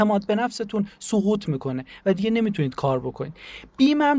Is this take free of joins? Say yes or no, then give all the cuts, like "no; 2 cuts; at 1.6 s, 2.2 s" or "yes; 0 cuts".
yes; 0 cuts